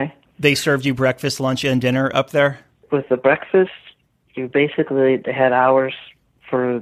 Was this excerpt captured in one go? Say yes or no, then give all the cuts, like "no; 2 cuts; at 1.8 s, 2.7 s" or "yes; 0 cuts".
yes; 0 cuts